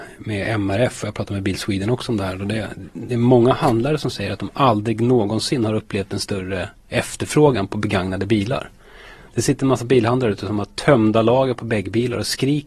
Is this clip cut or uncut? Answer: uncut